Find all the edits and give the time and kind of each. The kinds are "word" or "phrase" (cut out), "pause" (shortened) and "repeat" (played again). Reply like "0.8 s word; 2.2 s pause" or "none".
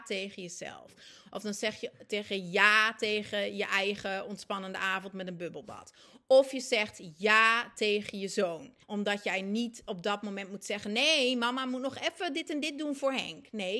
8.8 s pause

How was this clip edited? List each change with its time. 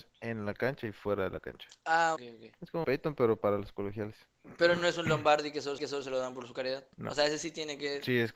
2.2 s word; 2.8 s word; 5.8 s repeat; 6.9 s pause

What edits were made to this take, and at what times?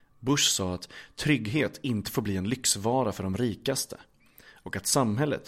none

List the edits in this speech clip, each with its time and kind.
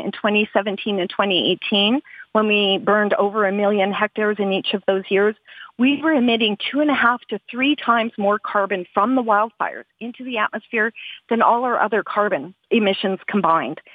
12.7 s word

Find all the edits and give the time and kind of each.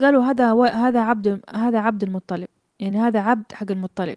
none

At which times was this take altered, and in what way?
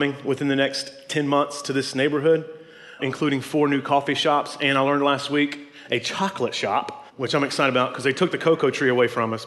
3.0 s word; 7.1 s pause

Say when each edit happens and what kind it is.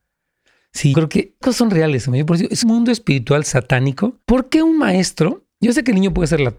0.9 s word; 1.4 s word; 2.6 s word; 4.2 s pause

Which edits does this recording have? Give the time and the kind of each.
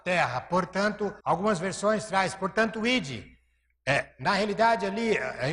1.2 s pause

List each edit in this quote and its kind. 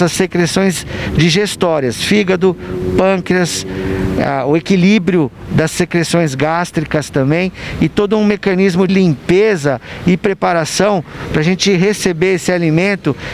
8.9 s word

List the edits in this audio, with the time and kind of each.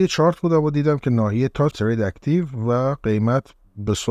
1.7 s phrase

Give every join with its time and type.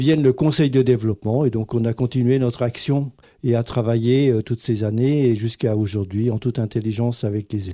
3.2 s pause

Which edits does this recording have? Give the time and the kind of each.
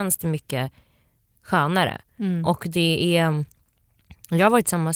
none

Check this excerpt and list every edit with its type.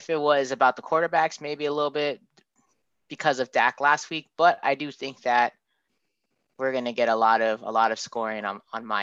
none

